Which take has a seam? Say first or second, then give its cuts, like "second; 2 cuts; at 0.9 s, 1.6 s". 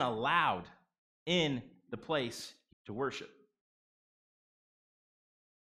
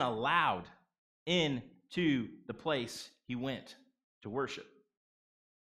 first; 2 cuts; at 1.9 s, 2.7 s